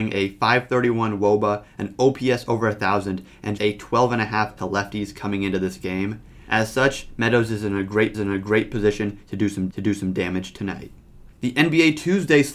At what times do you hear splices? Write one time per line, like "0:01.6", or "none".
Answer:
0:03.6
0:04.6
0:08.1
0:09.7
0:11.3